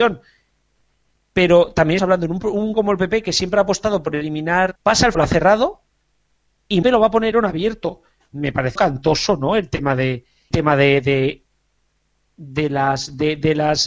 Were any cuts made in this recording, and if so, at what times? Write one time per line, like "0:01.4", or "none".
0:02.0
0:02.7
0:04.8
0:05.1
0:06.8
0:07.3
0:08.8
0:10.5